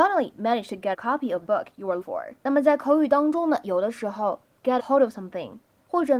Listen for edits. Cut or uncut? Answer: cut